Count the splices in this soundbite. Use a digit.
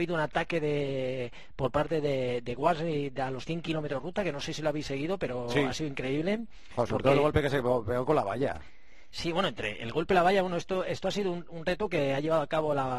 0